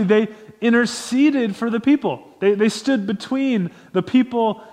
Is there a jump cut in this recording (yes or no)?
no